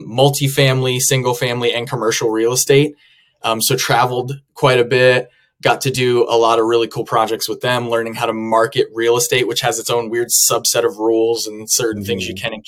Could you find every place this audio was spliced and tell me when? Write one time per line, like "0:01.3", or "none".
none